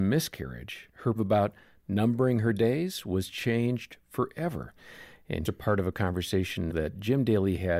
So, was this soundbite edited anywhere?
yes; 3 cuts; at 1.1 s, 5.4 s, 6.7 s

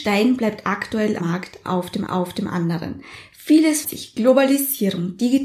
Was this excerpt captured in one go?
no; 3 cuts; at 1.2 s, 2.1 s, 3.8 s

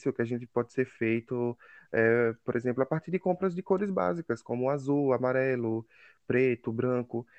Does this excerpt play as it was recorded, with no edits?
yes; 0 cuts

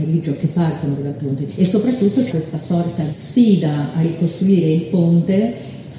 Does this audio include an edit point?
yes; 4 cuts; at 1.0 s, 1.5 s, 2.3 s, 3.1 s

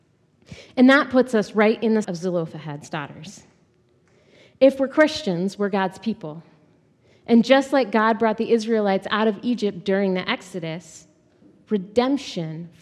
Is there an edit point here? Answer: yes; 1 cut; at 2.0 s

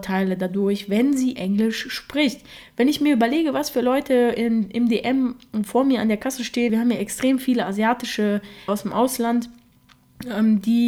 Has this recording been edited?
yes; 3 cuts; at 1.4 s, 6.7 s, 8.7 s

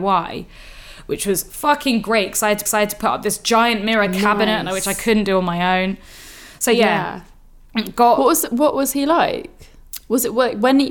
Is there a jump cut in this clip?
yes; 1 cut; at 2.7 s

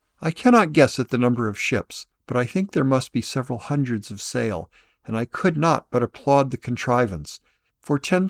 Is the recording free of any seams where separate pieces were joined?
no; 1 cut; at 2.1 s

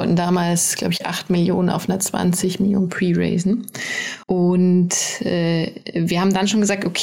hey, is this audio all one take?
no; 1 cut; at 4.2 s

